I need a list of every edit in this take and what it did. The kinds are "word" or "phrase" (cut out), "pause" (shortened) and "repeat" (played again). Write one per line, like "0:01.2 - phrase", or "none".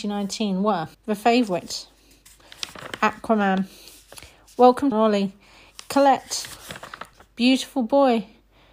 0:00.9 - pause
0:04.9 - phrase
0:07.1 - word